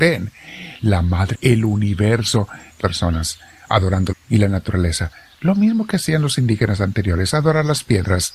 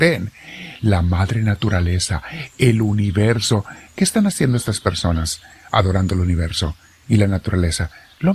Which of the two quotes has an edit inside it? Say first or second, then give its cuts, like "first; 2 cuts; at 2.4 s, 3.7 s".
first; 3 cuts; at 1.3 s, 2.8 s, 4.1 s